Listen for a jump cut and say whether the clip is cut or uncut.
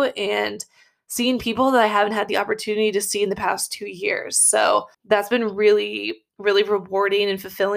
cut